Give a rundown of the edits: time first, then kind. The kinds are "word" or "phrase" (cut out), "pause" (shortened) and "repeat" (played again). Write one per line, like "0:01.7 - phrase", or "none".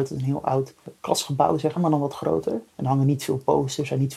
0:01.8 - word
0:02.7 - pause